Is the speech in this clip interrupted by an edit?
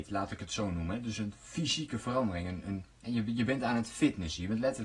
no; 0 cuts

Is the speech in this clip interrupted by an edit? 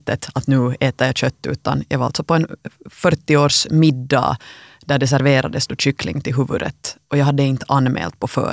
no; 0 cuts

